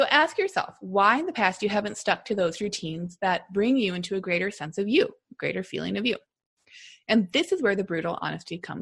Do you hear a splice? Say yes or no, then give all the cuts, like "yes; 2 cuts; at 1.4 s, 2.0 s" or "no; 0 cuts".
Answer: no; 0 cuts